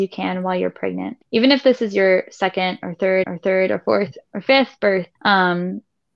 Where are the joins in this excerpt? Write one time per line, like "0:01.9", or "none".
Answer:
0:01.2
0:03.2
0:05.2

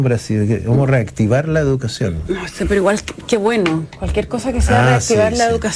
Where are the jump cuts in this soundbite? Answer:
none

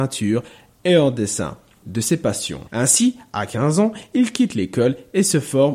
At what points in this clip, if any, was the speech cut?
0:01.8
0:02.7

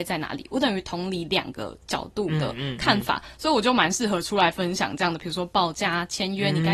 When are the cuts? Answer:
none

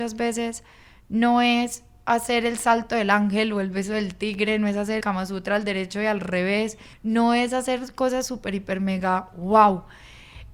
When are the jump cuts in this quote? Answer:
0:05.0
0:06.9

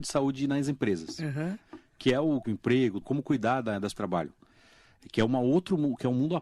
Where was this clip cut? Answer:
0:02.4
0:03.0
0:03.9

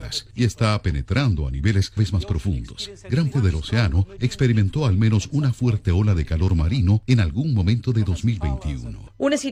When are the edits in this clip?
0:02.0
0:03.3

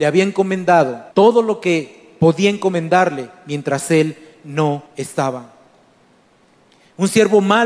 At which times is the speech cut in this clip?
0:01.1
0:04.9

